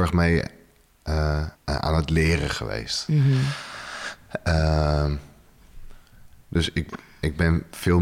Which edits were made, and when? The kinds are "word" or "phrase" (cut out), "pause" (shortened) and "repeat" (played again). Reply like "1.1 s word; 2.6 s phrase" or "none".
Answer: 1.6 s pause